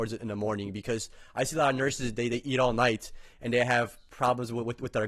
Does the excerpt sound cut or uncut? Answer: uncut